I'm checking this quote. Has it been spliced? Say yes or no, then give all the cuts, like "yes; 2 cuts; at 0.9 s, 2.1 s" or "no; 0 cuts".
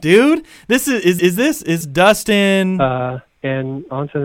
yes; 3 cuts; at 1.2 s, 1.8 s, 3.3 s